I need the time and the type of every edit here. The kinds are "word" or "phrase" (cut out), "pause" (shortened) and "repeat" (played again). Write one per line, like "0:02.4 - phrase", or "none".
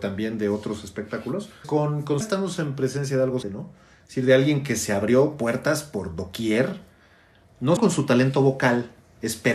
0:01.6 - word
0:02.2 - word
0:03.4 - word
0:07.8 - word